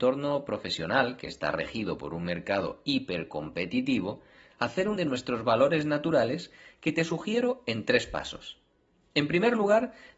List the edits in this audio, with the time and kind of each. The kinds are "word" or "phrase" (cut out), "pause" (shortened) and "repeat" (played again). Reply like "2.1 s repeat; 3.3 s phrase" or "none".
5.0 s word